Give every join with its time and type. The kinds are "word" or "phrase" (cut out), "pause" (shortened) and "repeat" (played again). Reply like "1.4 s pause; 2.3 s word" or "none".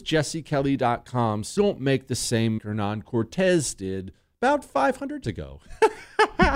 1.6 s word; 2.6 s word; 5.2 s word